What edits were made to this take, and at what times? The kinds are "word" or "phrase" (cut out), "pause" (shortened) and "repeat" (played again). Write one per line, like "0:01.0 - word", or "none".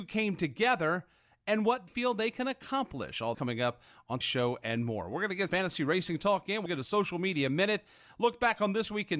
0:01.9 - word
0:03.3 - word
0:04.2 - word
0:05.5 - word
0:06.7 - word